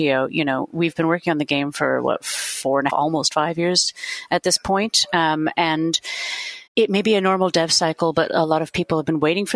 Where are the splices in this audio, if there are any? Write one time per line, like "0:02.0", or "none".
0:02.9
0:06.7